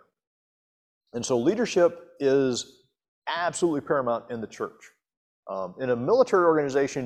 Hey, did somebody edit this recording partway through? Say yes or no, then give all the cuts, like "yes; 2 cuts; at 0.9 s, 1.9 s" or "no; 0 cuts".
no; 0 cuts